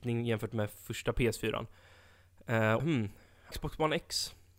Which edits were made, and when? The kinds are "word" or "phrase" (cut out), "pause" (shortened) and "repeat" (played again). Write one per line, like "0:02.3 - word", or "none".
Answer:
0:02.8 - phrase
0:03.5 - word